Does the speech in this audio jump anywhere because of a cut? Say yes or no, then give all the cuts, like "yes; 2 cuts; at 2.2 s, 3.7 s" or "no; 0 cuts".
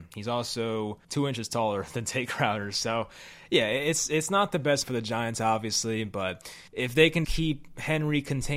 yes; 4 cuts; at 1.0 s, 4.8 s, 6.7 s, 7.2 s